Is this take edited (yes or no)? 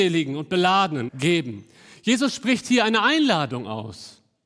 yes